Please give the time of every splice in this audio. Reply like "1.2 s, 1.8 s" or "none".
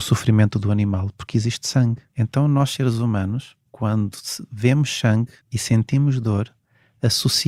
2.1 s, 3.7 s, 5.4 s